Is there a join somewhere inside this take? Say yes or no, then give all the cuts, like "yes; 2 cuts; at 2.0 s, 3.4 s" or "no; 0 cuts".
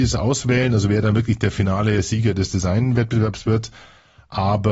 no; 0 cuts